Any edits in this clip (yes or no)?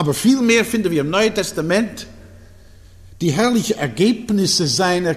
no